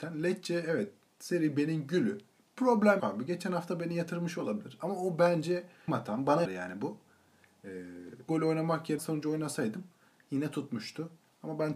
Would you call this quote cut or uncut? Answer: cut